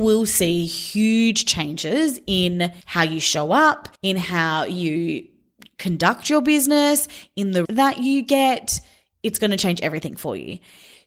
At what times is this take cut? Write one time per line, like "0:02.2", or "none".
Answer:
0:02.8
0:04.0
0:07.6